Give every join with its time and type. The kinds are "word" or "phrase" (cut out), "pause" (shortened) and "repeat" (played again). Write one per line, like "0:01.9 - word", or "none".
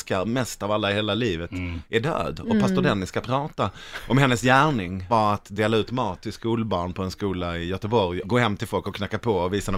0:05.1 - word
0:08.2 - word